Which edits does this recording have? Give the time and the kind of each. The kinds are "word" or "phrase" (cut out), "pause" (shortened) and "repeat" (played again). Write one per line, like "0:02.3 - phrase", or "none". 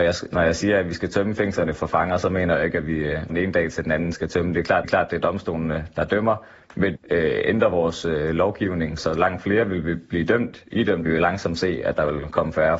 0:03.3 - word
0:04.1 - word
0:04.8 - repeat
0:07.0 - phrase
0:09.0 - word
0:11.0 - phrase